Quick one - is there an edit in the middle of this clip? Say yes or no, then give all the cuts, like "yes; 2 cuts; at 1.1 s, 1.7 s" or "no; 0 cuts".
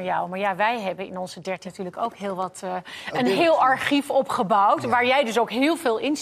yes; 1 cut; at 1.6 s